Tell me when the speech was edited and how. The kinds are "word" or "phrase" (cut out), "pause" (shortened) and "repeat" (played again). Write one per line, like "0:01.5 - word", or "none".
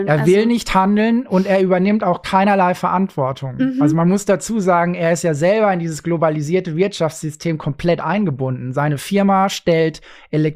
none

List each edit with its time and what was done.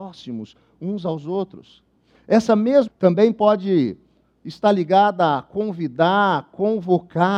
0:02.9 - word

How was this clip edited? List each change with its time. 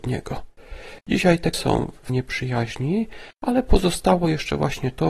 0:01.5 - phrase
0:02.1 - word

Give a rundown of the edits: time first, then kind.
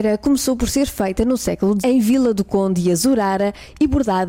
0:01.8 - word

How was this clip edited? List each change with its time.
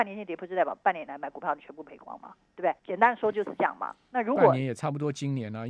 0:02.8 - pause

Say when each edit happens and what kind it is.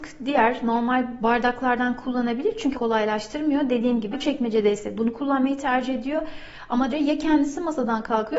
0:01.2 - word
0:02.7 - word
0:04.1 - word
0:05.0 - word
0:06.9 - word

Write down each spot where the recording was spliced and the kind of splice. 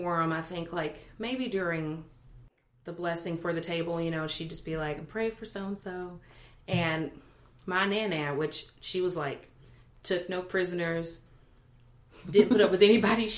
none

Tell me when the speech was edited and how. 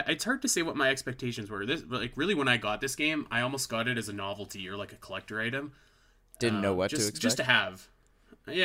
none

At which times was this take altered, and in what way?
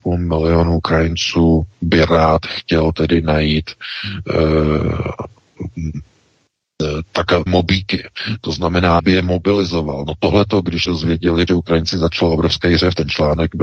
0:07.5 - word
0:09.0 - word
0:10.9 - word
0:11.5 - word

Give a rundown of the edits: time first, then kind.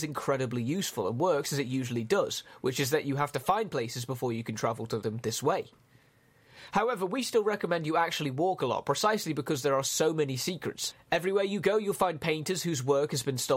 none

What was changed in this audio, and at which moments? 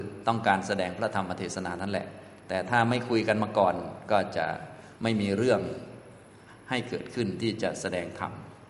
0:05.0 - pause

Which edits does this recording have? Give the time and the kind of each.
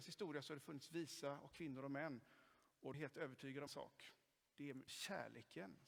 0:01.5 - word
0:02.9 - word
0:03.7 - word
0:04.9 - word

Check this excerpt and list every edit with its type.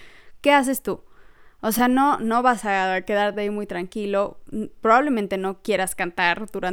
none

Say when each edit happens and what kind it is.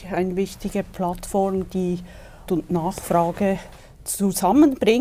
0:02.5 - word

